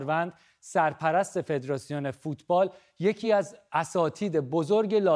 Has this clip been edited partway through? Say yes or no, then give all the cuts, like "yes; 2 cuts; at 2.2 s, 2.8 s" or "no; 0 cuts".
no; 0 cuts